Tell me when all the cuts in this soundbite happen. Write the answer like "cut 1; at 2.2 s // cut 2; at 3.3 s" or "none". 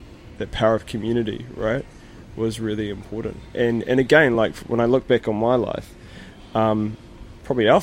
none